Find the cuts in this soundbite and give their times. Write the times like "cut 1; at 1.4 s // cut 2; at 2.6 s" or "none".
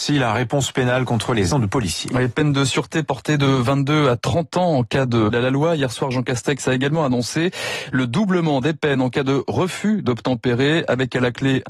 cut 1; at 1.5 s // cut 2; at 5.3 s